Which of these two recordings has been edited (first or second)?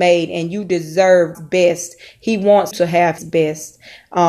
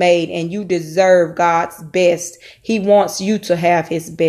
first